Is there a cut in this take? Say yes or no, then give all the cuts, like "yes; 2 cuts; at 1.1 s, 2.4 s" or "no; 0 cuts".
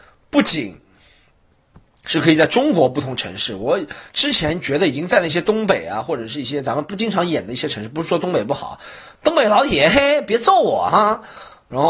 yes; 1 cut; at 4.1 s